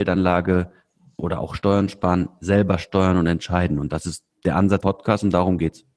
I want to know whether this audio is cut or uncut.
cut